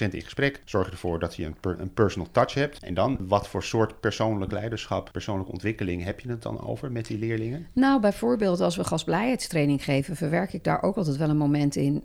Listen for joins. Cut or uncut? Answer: uncut